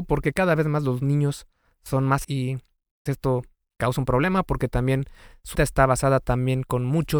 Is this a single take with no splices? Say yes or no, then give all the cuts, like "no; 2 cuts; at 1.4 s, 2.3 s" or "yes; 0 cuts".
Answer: no; 3 cuts; at 2.2 s, 3.1 s, 5.5 s